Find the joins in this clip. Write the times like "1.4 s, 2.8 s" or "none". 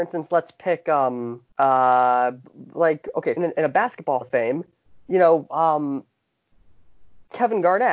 1.5 s, 3.4 s, 4.2 s, 4.8 s